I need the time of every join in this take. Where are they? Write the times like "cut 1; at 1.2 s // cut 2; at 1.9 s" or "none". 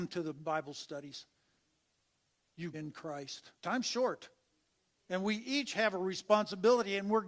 cut 1; at 2.7 s // cut 2; at 3.5 s